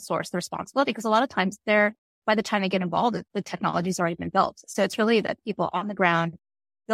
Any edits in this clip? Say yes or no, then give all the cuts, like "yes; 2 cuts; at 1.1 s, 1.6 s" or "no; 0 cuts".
no; 0 cuts